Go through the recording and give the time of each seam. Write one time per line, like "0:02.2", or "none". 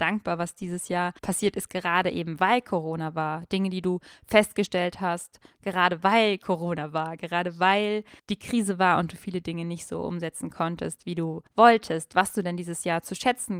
0:01.2
0:08.2
0:11.5